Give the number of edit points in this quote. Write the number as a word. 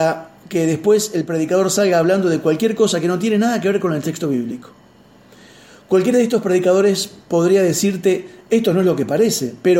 zero